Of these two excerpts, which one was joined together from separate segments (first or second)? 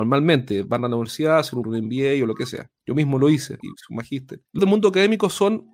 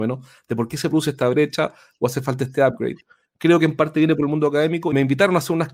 first